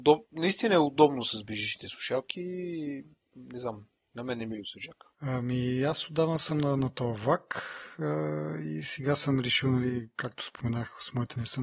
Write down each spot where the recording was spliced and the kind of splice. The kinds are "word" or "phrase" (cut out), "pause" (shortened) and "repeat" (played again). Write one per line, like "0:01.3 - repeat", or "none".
none